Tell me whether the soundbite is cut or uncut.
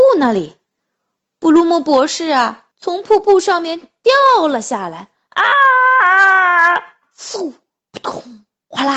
uncut